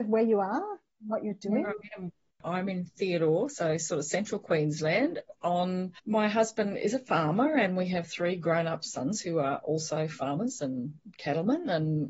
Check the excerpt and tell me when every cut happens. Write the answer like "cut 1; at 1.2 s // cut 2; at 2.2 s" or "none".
cut 1; at 6.0 s